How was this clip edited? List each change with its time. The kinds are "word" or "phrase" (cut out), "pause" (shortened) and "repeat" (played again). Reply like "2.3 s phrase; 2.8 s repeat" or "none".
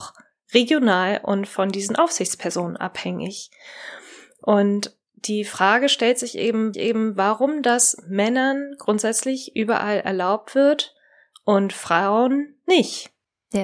6.7 s repeat

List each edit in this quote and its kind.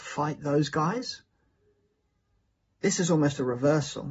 none

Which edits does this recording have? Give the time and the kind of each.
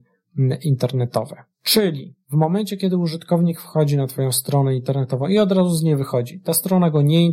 none

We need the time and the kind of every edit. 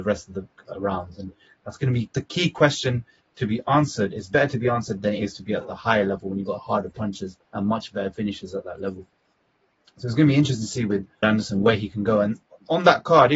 2.1 s word; 5.0 s word; 7.4 s pause; 11.2 s word

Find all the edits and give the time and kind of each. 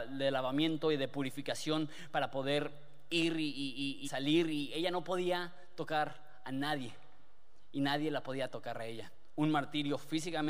4.0 s word

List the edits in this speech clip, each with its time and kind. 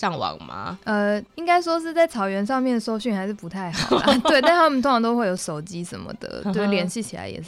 none

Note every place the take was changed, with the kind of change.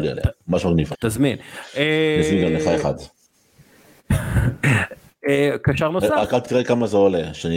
0.9 s word; 6.4 s word

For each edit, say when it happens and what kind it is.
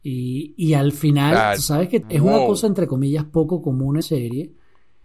2.0 s word; 4.0 s word

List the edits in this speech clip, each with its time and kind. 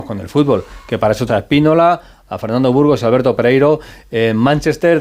1.3 s word

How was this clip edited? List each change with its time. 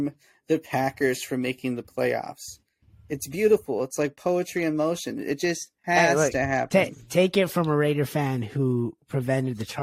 5.8 s pause

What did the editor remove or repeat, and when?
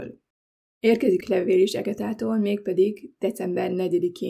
1.2 s phrase

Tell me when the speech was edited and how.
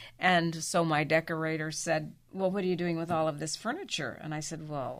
2.2 s pause

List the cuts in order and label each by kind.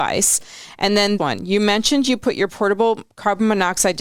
1.2 s word

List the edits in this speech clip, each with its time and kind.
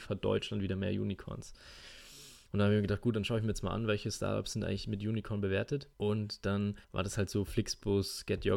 5.9 s pause; 6.8 s pause

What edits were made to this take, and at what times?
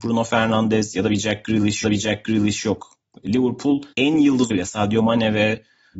1.8 s repeat; 3.9 s pause; 4.5 s word

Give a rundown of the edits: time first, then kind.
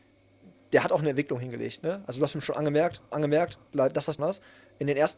3.1 s repeat; 4.2 s phrase

